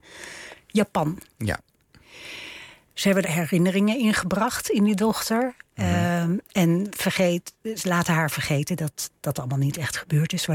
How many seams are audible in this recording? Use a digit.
1